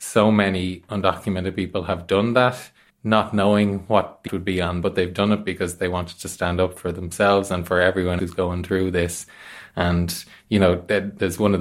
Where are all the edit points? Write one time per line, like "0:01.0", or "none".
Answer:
0:02.9
0:04.3
0:04.8
0:08.2